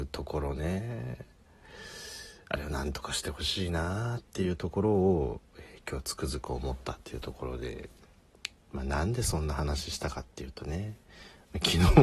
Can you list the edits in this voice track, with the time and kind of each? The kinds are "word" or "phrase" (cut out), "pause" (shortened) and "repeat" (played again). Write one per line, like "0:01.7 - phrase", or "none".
none